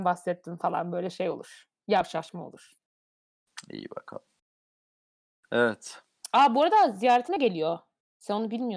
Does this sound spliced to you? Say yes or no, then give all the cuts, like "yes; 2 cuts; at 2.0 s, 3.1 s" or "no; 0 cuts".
no; 0 cuts